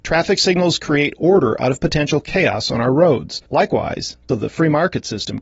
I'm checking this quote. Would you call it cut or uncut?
cut